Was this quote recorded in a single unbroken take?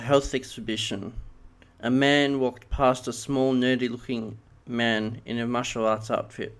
yes; 0 cuts

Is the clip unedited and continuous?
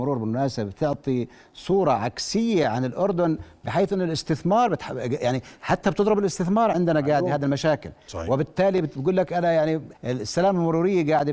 no; 1 cut; at 9.9 s

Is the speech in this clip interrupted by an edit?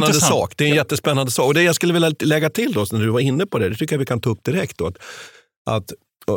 no; 0 cuts

